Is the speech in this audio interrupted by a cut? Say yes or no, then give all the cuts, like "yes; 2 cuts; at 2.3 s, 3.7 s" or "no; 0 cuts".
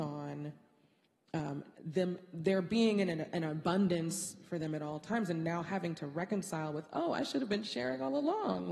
yes; 1 cut; at 1.7 s